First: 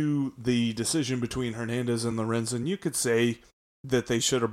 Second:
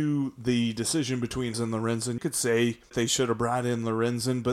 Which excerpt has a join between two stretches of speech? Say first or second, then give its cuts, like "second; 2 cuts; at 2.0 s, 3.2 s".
second; 3 cuts; at 1.5 s, 2.2 s, 2.9 s